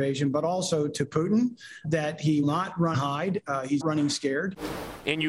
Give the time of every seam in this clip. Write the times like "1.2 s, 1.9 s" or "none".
1.8 s, 2.4 s, 2.9 s, 3.8 s